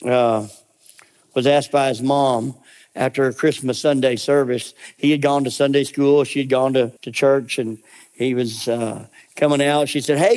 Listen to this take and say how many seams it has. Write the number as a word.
one